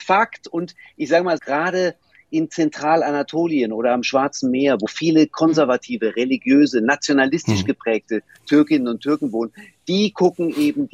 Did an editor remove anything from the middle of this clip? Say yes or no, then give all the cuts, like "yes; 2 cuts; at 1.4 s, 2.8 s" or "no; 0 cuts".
yes; 2 cuts; at 1.4 s, 4.9 s